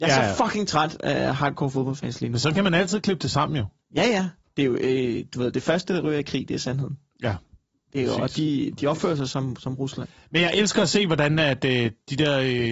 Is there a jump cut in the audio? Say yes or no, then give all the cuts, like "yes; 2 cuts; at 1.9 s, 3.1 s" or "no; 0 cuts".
no; 0 cuts